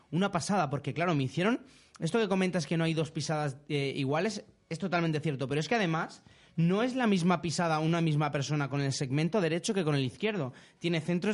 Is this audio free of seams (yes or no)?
yes